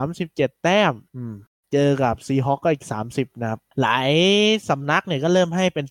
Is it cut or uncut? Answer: cut